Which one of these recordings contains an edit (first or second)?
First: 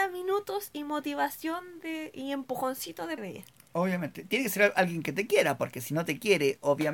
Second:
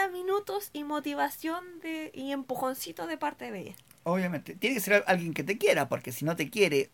first